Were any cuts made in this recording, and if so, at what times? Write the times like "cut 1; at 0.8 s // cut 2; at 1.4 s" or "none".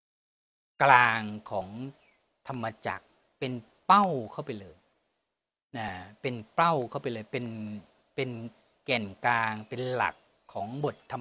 none